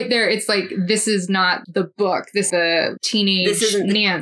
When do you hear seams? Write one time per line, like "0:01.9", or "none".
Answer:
0:01.6
0:02.5
0:03.0